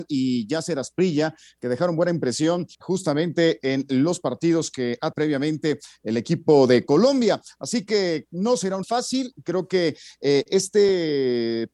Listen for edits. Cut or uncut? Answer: cut